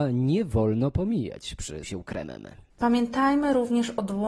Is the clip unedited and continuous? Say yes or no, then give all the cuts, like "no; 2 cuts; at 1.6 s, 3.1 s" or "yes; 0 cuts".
no; 1 cut; at 1.8 s